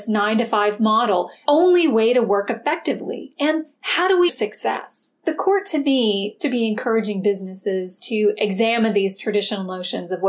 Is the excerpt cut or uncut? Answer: cut